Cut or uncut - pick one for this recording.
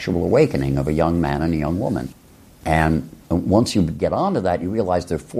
uncut